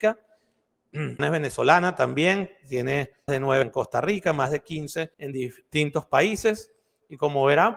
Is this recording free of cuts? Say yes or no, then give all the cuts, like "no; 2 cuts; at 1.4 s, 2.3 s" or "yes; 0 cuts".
no; 4 cuts; at 1.2 s, 3.3 s, 3.6 s, 5.1 s